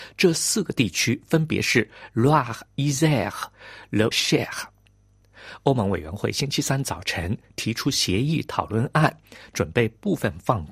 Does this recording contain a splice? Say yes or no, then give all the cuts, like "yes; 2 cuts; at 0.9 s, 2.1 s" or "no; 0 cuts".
yes; 2 cuts; at 2.7 s, 4.1 s